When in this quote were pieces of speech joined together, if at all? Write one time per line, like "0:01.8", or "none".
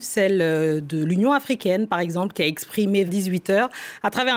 0:03.1